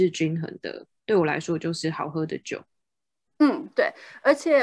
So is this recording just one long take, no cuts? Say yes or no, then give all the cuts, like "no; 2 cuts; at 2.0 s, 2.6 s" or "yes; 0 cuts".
yes; 0 cuts